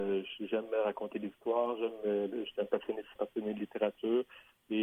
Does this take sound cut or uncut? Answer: cut